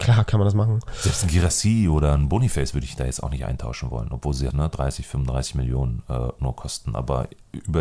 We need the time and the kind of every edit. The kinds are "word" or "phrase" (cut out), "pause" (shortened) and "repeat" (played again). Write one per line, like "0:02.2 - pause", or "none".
0:04.5 - word